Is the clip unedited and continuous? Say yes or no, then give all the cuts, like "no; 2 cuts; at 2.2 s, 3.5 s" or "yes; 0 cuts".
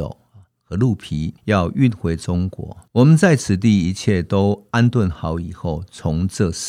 no; 2 cuts; at 1.4 s, 2.9 s